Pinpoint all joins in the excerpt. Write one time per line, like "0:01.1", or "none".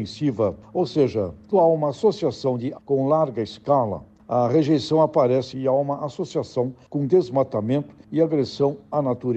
0:01.5
0:02.7
0:05.5